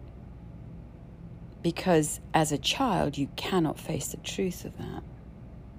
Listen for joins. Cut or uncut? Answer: uncut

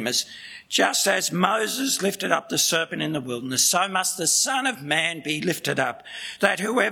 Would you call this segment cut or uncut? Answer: uncut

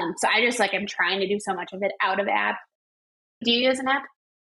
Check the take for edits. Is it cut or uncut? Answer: uncut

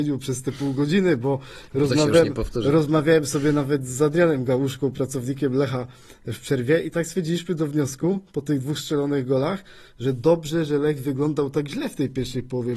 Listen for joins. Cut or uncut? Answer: uncut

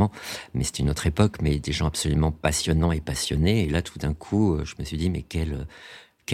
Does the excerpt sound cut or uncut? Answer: uncut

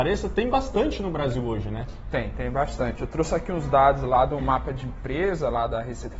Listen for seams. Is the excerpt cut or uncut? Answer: uncut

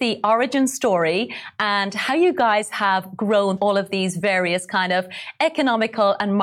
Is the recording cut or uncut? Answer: cut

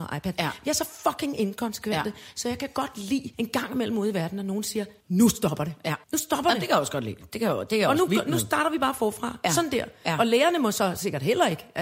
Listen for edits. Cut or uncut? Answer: cut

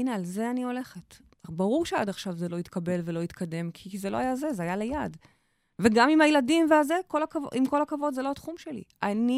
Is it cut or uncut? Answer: uncut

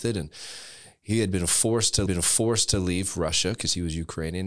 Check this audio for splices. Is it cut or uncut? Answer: cut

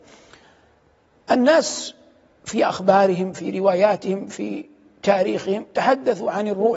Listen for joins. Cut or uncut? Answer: uncut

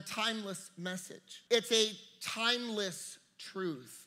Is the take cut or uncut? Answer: cut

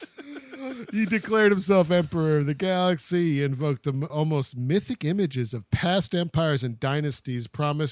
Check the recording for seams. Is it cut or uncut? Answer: cut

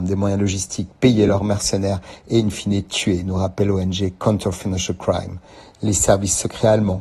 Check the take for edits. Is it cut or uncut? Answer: uncut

